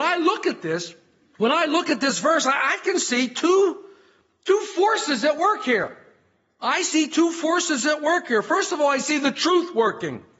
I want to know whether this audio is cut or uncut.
uncut